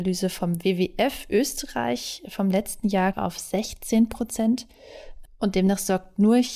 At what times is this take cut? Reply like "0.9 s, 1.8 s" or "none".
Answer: 3.1 s